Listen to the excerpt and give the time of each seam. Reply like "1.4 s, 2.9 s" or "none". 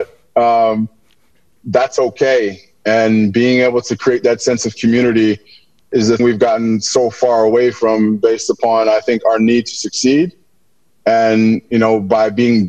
6.2 s